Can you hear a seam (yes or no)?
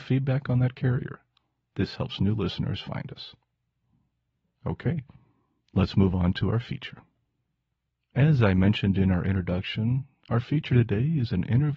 no